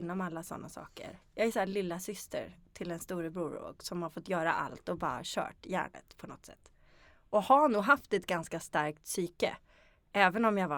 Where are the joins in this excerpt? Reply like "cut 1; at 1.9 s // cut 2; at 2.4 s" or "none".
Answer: none